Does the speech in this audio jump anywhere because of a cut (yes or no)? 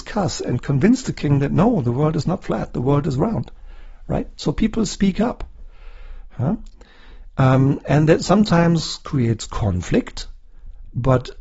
no